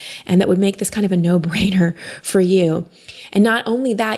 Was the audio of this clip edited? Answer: no; 0 cuts

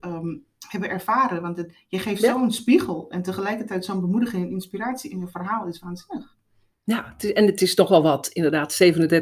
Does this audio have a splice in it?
no; 0 cuts

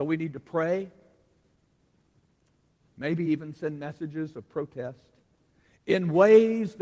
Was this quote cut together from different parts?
no; 0 cuts

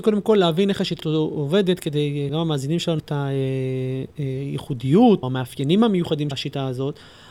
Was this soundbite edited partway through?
yes; 5 cuts; at 1.0 s, 2.3 s, 3.0 s, 5.2 s, 6.3 s

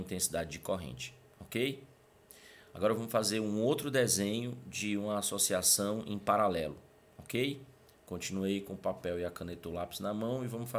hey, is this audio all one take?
yes; 0 cuts

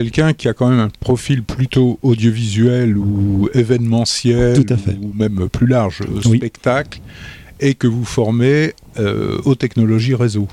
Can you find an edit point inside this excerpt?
no; 0 cuts

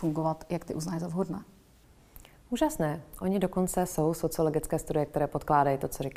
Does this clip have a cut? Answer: no; 0 cuts

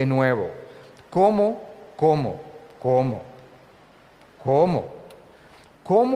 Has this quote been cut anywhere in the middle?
no; 0 cuts

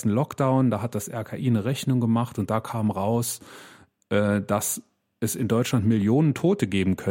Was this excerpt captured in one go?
yes; 0 cuts

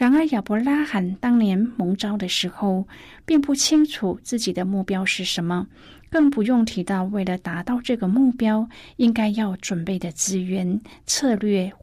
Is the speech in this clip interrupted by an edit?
no; 0 cuts

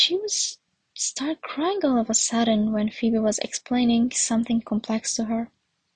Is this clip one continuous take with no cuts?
yes; 0 cuts

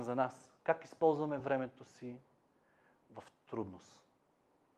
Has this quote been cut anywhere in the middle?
no; 0 cuts

